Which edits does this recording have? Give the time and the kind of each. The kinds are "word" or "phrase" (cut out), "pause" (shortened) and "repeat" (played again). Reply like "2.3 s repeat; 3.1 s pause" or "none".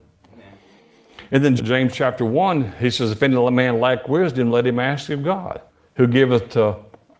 1.6 s word; 5.7 s pause